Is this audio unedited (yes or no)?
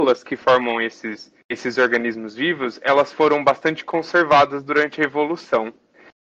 no